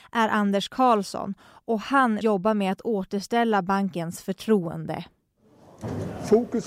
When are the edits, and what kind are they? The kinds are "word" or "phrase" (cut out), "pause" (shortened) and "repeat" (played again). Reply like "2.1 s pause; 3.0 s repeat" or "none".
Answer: 2.2 s word

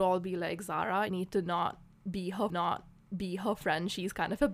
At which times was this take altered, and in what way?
1.1 s word; 2.5 s repeat

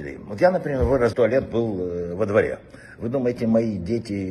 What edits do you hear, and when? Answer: 1.1 s phrase

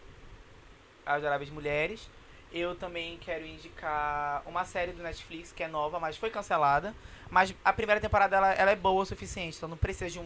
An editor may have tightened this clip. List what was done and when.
none

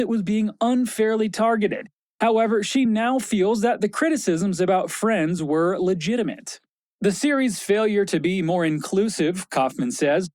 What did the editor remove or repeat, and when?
none

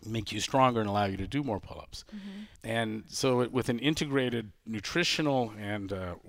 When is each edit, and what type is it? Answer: 2.6 s pause

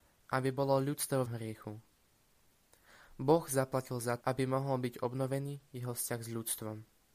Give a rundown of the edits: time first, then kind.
1.3 s phrase; 4.2 s word

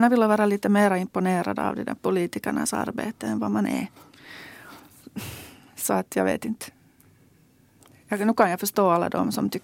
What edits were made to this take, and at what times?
none

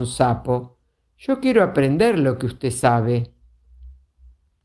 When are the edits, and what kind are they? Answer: none

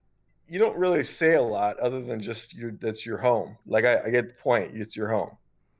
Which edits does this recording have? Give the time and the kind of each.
none

